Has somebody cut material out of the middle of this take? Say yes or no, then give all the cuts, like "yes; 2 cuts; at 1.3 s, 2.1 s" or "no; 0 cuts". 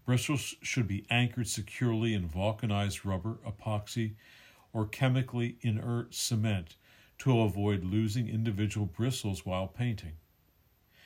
no; 0 cuts